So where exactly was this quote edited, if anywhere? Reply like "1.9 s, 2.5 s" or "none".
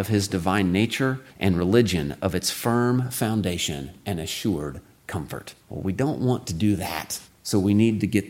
1.3 s, 5.6 s, 7.3 s